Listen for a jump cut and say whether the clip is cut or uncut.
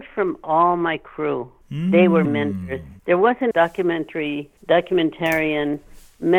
cut